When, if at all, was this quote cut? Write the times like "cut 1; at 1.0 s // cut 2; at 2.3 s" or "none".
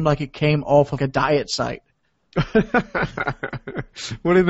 cut 1; at 1.0 s